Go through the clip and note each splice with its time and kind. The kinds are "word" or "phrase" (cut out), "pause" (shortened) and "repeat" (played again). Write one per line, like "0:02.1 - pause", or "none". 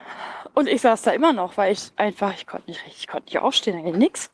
none